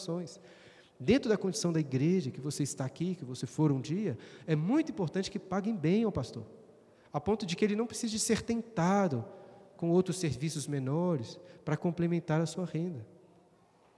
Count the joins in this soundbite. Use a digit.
0